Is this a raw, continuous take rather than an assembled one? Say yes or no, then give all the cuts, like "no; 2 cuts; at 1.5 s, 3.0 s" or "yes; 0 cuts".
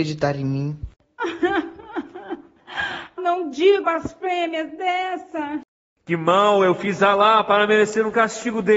no; 2 cuts; at 3.2 s, 3.8 s